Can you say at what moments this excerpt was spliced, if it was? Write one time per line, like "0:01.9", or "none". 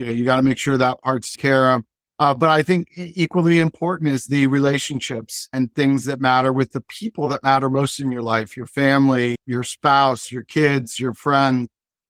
0:01.3
0:02.0
0:09.3